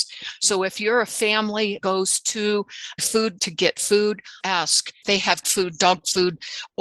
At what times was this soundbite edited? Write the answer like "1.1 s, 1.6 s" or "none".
1.8 s, 3.0 s, 3.4 s, 4.4 s, 5.0 s, 5.4 s